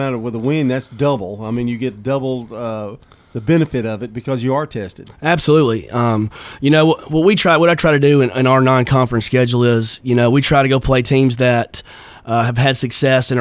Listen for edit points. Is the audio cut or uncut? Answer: uncut